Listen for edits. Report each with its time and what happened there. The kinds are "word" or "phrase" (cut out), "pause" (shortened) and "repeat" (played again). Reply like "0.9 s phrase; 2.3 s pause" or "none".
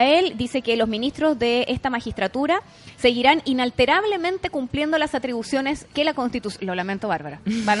none